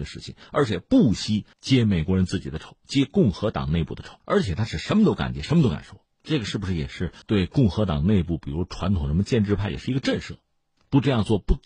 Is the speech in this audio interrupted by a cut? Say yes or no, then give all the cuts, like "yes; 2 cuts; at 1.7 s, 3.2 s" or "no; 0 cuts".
yes; 4 cuts; at 1.5 s, 4.2 s, 6.1 s, 7.2 s